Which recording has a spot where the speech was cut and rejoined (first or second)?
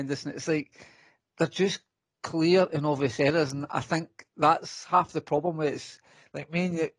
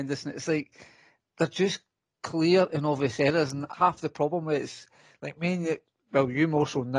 second